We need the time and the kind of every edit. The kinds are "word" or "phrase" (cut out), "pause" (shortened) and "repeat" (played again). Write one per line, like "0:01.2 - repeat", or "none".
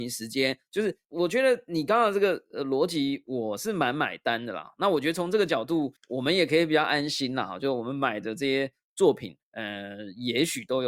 0:01.0 - pause
0:06.0 - pause
0:09.4 - pause